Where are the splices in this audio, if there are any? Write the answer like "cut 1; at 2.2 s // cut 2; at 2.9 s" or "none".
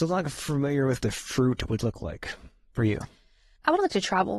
cut 1; at 1.0 s